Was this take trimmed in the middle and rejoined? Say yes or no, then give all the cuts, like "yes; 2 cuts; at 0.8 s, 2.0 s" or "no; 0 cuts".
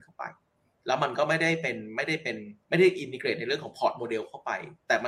yes; 1 cut; at 2.6 s